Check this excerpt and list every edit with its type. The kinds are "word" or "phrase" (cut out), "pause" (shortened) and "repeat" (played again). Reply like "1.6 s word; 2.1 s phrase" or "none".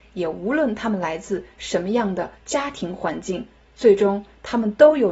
2.4 s pause

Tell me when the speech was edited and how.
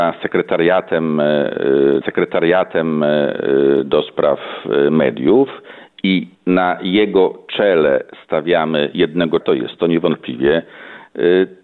2.0 s repeat; 6.3 s pause; 9.4 s word

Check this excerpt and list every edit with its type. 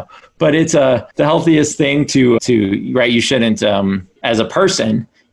1.1 s pause; 2.4 s word; 4.2 s pause

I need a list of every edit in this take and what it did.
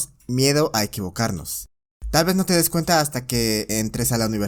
none

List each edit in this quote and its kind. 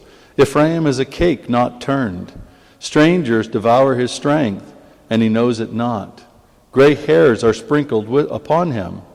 none

